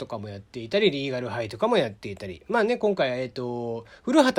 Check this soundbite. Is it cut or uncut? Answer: uncut